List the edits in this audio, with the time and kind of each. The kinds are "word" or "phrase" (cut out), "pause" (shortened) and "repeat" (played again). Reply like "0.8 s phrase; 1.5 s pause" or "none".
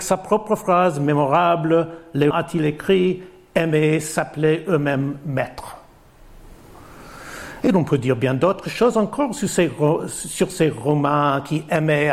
2.3 s word